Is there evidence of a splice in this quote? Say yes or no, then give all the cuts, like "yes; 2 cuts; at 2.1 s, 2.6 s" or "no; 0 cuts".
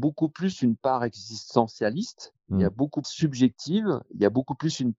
yes; 2 cuts; at 2.4 s, 3.0 s